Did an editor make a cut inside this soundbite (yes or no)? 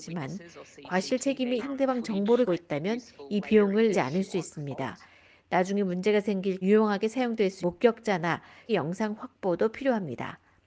yes